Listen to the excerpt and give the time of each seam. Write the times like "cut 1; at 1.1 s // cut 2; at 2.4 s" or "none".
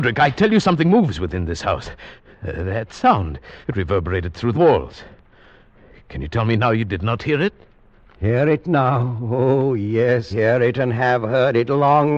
cut 1; at 2.3 s // cut 2; at 3.6 s // cut 3; at 4.5 s // cut 4; at 10.3 s